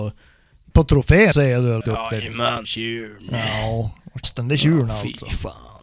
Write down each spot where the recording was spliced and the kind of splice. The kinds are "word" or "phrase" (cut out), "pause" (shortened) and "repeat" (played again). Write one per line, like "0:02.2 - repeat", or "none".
0:01.3 - word
0:01.8 - word
0:02.6 - word
0:04.2 - word